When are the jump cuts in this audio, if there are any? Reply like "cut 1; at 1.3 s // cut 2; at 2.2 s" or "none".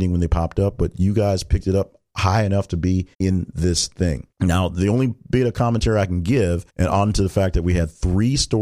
cut 1; at 3.1 s // cut 2; at 4.3 s // cut 3; at 6.7 s

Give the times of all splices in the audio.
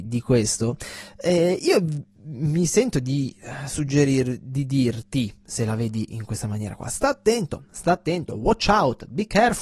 none

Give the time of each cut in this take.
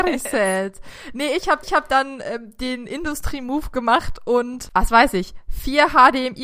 cut 1; at 1.6 s

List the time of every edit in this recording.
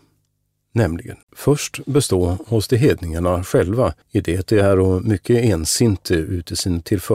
cut 1; at 1.2 s // cut 2; at 4.0 s

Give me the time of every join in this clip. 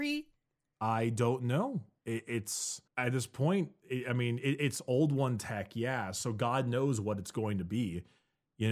cut 1; at 2.9 s

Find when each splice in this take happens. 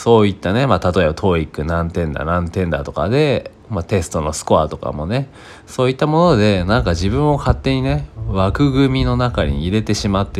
cut 1; at 3.6 s

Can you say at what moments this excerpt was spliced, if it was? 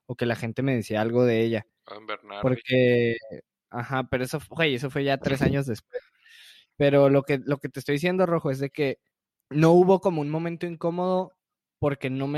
cut 1; at 9.1 s

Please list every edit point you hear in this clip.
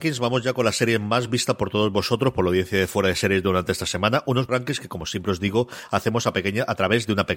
cut 1; at 4.5 s

